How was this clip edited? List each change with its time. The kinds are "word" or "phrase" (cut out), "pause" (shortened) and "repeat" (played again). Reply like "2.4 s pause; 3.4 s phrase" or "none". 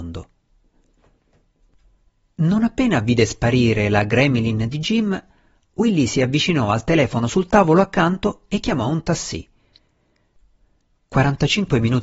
none